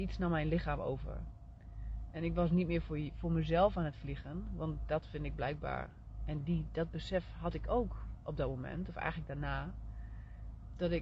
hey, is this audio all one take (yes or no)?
yes